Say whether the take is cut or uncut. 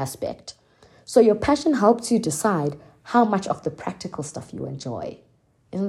uncut